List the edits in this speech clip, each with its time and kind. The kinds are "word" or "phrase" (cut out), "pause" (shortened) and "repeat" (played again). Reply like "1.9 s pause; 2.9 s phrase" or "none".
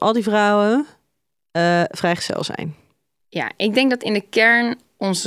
none